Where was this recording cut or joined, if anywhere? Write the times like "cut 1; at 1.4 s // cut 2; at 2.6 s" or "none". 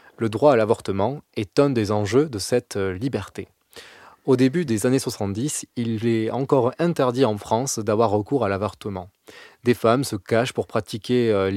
none